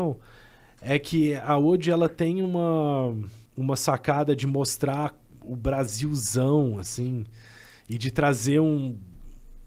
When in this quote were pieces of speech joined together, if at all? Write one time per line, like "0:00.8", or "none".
0:03.5